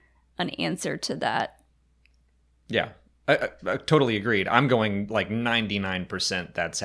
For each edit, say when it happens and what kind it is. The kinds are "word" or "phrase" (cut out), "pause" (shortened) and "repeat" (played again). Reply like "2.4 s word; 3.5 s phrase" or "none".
none